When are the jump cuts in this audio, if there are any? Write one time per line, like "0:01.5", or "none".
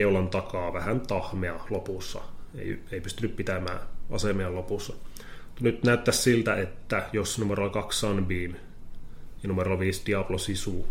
none

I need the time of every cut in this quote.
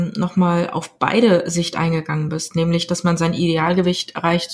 none

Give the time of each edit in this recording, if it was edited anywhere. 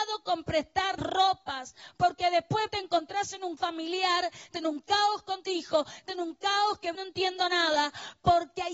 0:01.0
0:02.7
0:03.6
0:04.5
0:05.4
0:06.1
0:06.9

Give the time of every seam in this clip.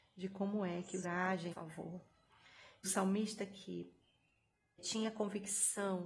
0:01.0
0:01.5
0:02.8
0:04.8

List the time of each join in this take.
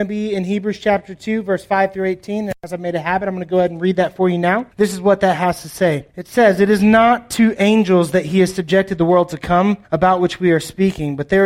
0:04.7
0:06.1
0:09.8

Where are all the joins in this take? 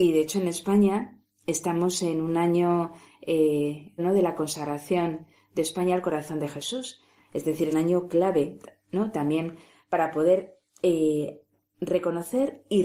0:04.0
0:07.7

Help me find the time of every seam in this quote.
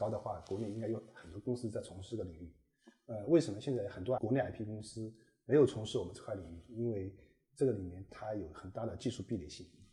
none

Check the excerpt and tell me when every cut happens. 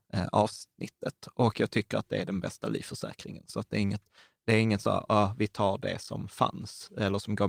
none

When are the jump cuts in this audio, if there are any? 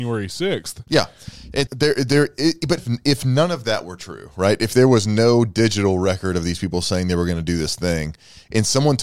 0:01.7
0:02.8

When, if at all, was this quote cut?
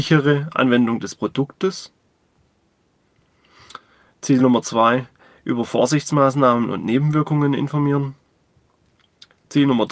none

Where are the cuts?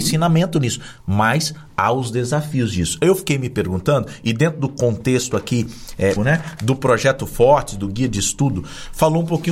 0:06.2

